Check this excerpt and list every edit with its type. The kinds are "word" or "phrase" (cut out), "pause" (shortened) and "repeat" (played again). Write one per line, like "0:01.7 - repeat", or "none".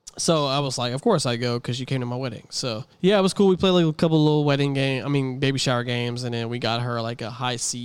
0:02.9 - pause